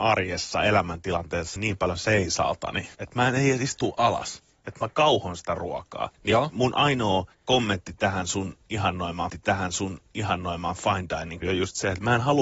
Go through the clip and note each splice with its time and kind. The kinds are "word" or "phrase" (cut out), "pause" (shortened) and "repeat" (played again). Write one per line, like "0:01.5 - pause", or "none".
0:01.6 - word
0:02.9 - pause
0:06.1 - pause
0:07.3 - pause
0:09.3 - repeat
0:11.4 - word